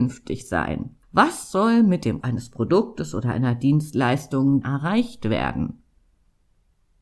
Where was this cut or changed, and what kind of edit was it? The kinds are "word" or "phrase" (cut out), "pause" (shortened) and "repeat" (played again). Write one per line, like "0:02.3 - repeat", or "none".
0:01.0 - pause
0:02.2 - word
0:04.6 - word